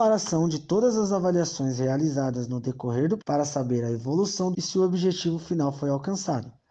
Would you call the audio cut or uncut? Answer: cut